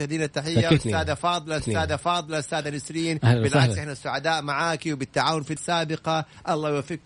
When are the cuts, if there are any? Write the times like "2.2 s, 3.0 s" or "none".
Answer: 1.6 s, 5.6 s